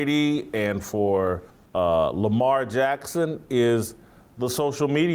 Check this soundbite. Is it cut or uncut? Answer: cut